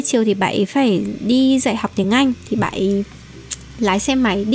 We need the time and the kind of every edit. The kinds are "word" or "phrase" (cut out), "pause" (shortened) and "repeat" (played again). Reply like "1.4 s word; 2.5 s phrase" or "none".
none